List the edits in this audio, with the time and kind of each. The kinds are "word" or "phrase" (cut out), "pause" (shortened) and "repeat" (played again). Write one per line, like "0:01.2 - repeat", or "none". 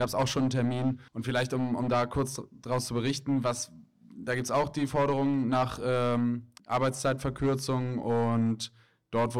0:01.1 - pause
0:06.6 - pause

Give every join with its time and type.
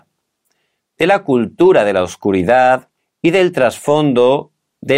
0:03.0 - pause

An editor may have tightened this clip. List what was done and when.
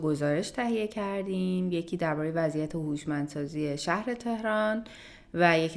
none

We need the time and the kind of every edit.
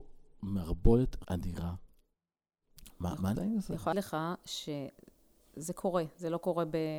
0:01.2 - word
0:03.3 - word
0:03.9 - word

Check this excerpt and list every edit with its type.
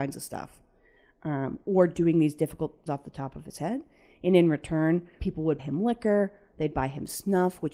0:02.9 - word
0:05.2 - word
0:05.6 - word

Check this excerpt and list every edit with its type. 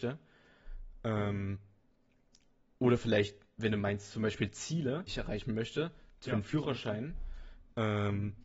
0:05.1 - word
0:06.3 - word

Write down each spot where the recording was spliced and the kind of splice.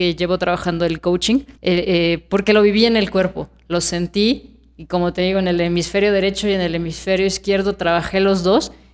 0:01.6 - pause

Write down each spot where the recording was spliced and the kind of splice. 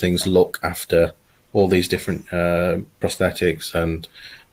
0:03.0 - word

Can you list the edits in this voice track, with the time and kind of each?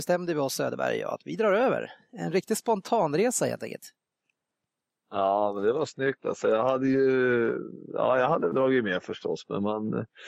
0:08.5 - word

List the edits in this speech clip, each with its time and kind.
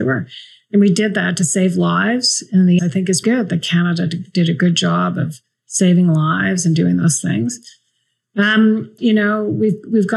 0:02.8 - word
0:03.2 - word
0:09.0 - word

